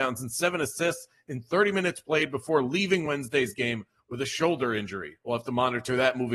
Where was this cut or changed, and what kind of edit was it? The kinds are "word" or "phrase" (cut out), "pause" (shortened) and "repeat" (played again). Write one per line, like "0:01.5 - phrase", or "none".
none